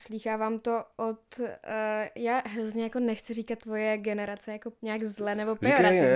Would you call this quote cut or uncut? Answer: cut